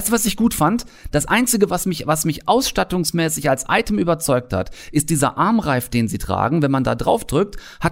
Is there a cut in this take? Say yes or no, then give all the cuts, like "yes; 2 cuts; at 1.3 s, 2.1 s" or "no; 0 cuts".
no; 0 cuts